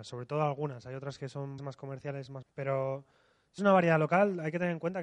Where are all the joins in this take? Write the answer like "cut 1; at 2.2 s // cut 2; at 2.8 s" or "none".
cut 1; at 1.6 s // cut 2; at 2.4 s // cut 3; at 3.6 s